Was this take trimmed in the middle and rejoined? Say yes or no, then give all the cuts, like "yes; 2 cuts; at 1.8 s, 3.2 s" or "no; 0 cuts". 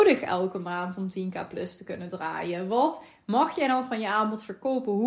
no; 0 cuts